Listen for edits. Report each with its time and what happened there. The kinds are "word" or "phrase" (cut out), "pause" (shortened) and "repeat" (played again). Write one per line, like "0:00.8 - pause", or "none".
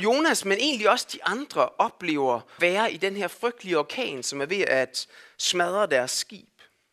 0:02.6 - word